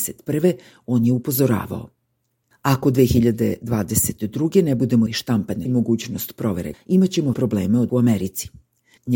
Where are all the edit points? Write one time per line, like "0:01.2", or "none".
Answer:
0:05.1
0:05.7
0:06.7
0:07.3
0:07.9